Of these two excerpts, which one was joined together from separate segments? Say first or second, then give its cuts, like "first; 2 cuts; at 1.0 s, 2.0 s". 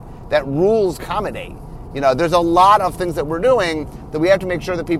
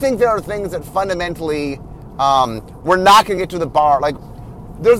first; 1 cut; at 1.0 s